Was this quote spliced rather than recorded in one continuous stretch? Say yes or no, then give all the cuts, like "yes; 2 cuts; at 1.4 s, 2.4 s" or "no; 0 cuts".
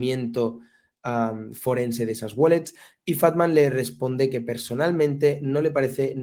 no; 0 cuts